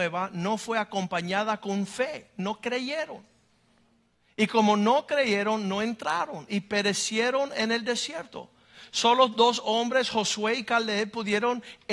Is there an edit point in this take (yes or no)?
no